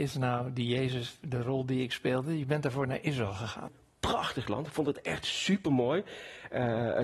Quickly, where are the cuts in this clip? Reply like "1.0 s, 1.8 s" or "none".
none